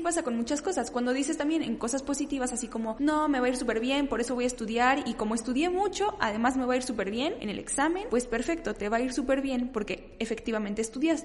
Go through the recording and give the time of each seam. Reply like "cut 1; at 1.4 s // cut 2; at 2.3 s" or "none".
none